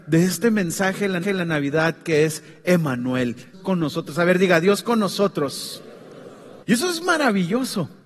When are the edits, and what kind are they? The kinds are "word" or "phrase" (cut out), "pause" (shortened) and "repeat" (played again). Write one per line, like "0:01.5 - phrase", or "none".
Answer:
0:01.2 - repeat
0:03.5 - word
0:06.6 - pause